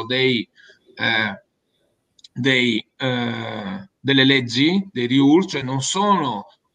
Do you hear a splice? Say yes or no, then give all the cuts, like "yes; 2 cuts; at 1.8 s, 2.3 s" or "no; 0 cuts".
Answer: no; 0 cuts